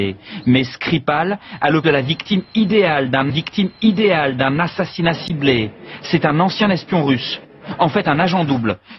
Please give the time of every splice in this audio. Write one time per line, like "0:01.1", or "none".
0:01.8
0:03.3